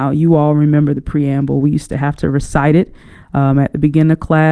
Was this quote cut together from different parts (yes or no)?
no